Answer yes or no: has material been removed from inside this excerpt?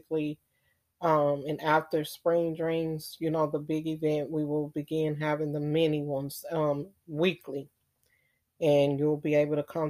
no